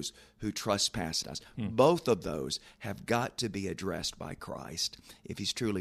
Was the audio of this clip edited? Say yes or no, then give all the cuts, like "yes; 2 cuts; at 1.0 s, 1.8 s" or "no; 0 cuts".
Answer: yes; 1 cut; at 1.2 s